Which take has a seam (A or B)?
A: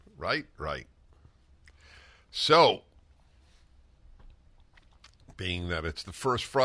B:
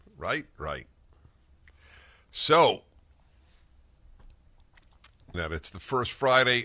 B